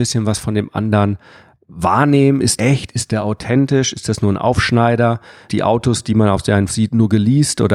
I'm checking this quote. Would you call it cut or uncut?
cut